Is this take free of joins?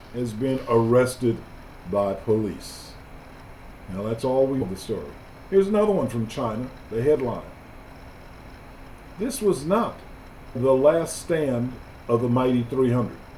no; 2 cuts; at 4.6 s, 10.5 s

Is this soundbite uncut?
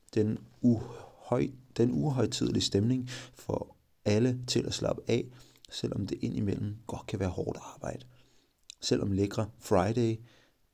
yes; 0 cuts

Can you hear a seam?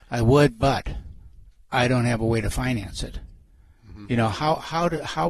no; 0 cuts

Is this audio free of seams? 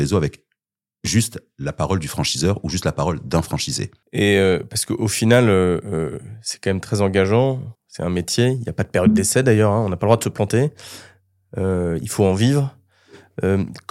no; 1 cut; at 7.7 s

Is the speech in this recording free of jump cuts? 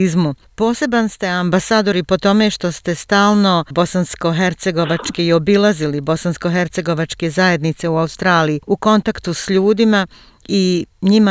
no; 1 cut; at 3.7 s

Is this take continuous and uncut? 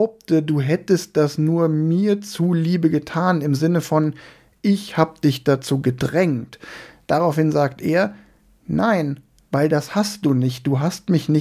yes; 0 cuts

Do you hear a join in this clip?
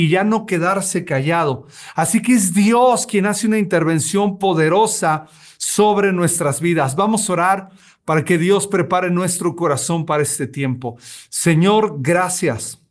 no; 0 cuts

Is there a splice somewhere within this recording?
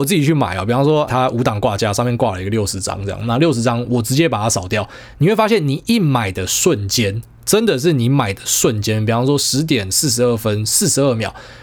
yes; 1 cut; at 1.1 s

